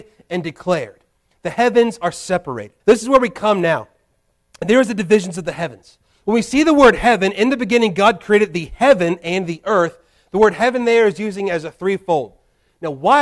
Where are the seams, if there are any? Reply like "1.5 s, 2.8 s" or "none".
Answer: 2.8 s

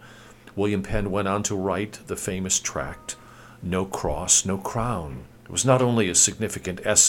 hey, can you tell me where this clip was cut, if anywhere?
5.3 s

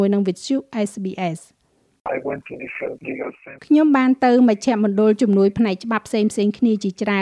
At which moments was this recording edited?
3.6 s

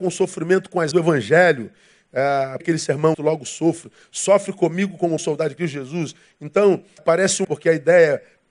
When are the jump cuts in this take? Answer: 0.9 s, 2.6 s, 3.1 s, 5.2 s, 7.0 s, 7.4 s

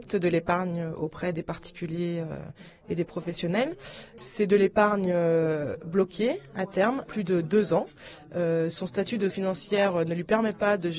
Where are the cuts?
7.1 s, 9.3 s

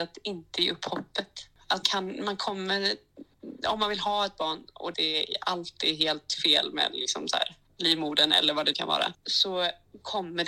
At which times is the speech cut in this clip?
1.8 s, 4.9 s, 8.7 s

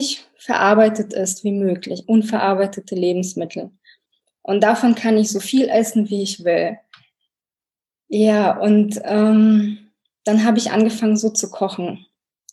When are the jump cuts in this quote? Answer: 2.0 s

